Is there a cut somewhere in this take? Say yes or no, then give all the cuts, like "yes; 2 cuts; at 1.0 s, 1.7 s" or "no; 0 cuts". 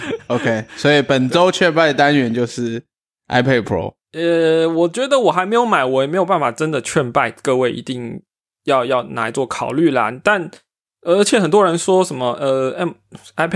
no; 0 cuts